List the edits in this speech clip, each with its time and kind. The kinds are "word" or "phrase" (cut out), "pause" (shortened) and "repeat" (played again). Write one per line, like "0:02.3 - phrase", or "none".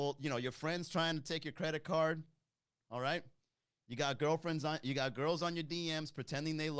none